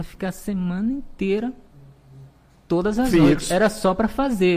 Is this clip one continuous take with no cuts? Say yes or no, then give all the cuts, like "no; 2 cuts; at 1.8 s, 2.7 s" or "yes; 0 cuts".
yes; 0 cuts